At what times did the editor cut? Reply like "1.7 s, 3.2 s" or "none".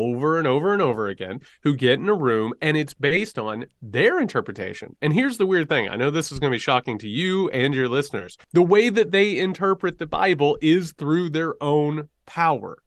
8.4 s